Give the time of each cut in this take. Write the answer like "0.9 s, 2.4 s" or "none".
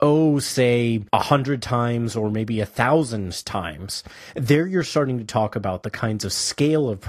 1.1 s